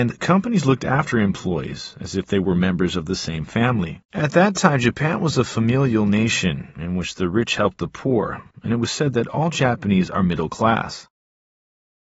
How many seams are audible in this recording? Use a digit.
1